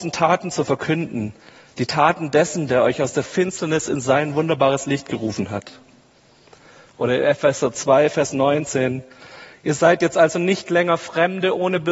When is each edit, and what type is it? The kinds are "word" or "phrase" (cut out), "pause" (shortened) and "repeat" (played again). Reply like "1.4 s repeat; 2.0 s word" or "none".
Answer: none

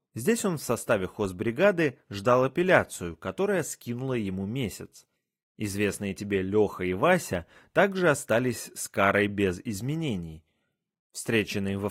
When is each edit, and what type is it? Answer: none

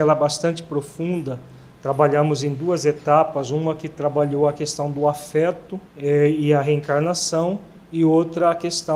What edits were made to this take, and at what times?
5.9 s pause

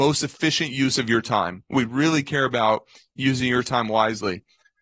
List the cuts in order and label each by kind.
none

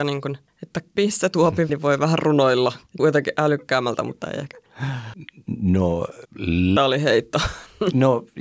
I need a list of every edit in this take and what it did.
1.0 s word; 1.7 s word; 3.0 s phrase; 6.8 s word

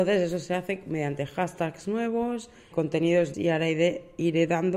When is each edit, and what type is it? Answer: 2.7 s word; 3.3 s word

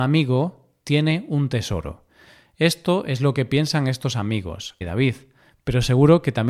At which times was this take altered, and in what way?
4.8 s word

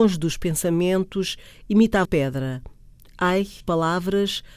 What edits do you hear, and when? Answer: 2.0 s word; 3.6 s word

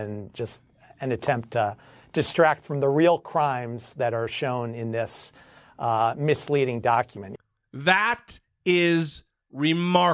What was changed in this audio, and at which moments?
none

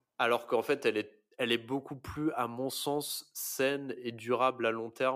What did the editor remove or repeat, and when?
1.3 s pause

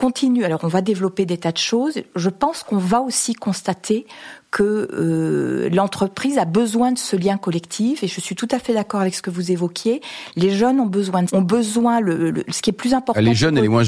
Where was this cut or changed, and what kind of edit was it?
11.3 s word

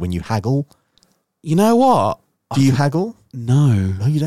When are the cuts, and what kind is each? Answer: none

